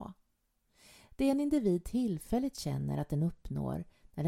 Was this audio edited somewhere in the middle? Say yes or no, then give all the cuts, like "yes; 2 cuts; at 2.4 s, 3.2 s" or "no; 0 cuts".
no; 0 cuts